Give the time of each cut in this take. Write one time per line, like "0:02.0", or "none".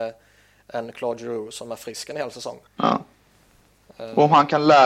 0:02.7

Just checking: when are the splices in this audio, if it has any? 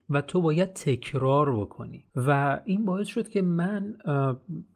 0:02.1

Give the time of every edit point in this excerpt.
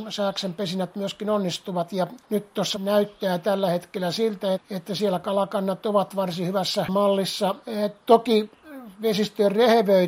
0:02.2
0:02.7
0:04.5
0:07.6

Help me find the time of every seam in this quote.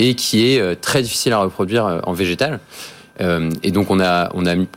none

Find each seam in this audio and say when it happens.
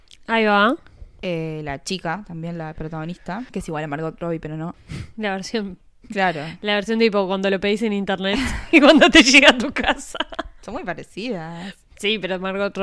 0:05.8

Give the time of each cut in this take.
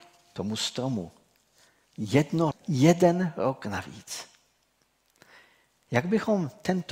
0:02.5

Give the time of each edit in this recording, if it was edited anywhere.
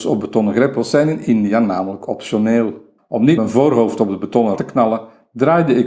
0:03.0
0:03.4
0:04.6

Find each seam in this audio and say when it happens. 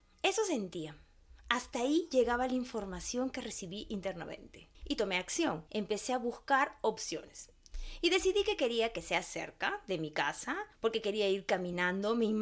0:04.7
0:05.7
0:10.7

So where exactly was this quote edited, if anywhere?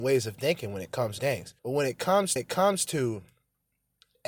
0:01.2
0:01.6
0:02.4

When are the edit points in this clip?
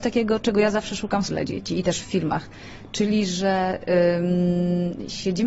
0:01.3

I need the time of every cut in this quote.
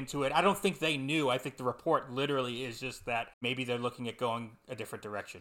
0:03.3

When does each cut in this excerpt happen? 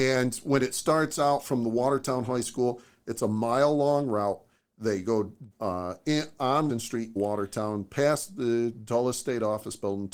0:05.5
0:06.7
0:07.2

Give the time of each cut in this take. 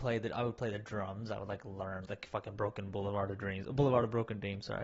0:02.1

